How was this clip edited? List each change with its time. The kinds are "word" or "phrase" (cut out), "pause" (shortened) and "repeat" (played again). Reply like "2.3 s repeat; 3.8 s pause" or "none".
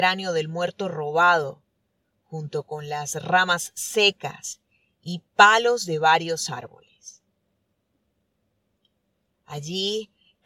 none